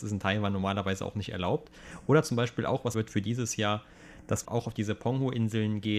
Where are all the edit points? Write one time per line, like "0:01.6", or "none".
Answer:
0:02.9
0:04.4